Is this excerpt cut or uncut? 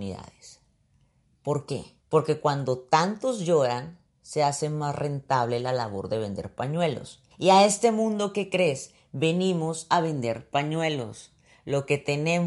cut